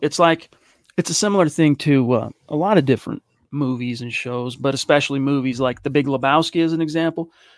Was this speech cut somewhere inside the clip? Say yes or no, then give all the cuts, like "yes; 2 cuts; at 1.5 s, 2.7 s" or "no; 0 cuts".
no; 0 cuts